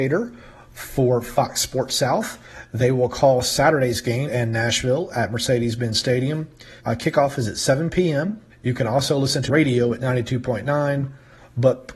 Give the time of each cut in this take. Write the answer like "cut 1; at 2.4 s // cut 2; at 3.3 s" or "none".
cut 1; at 4.3 s // cut 2; at 6.8 s // cut 3; at 8.5 s // cut 4; at 9.5 s